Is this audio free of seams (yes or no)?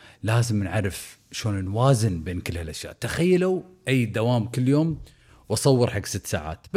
yes